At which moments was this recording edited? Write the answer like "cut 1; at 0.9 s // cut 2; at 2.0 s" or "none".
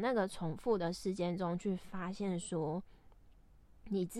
none